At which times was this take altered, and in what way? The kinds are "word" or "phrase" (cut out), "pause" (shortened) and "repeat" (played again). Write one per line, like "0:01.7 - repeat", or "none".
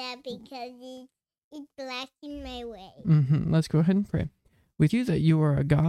0:04.9 - word